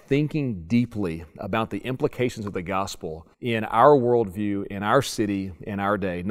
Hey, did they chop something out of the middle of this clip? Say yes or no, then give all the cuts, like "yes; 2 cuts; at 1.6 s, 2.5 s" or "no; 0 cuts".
yes; 1 cut; at 3.3 s